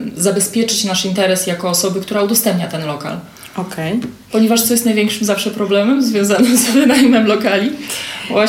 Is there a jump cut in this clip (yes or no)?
no